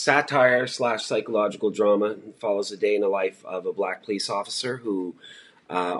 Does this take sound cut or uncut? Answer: uncut